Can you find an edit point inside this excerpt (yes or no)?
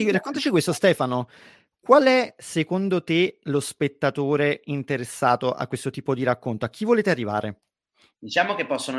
no